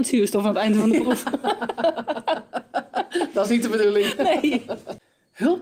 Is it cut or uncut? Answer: uncut